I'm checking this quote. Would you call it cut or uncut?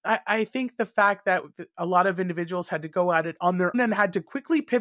cut